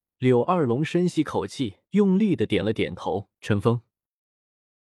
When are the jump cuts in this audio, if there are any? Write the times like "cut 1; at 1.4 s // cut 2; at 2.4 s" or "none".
cut 1; at 1.8 s // cut 2; at 3.4 s